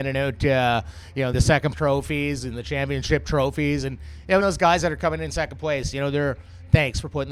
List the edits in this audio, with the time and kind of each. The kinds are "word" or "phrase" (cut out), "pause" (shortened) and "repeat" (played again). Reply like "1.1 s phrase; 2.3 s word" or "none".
1.3 s phrase; 1.7 s word; 4.4 s word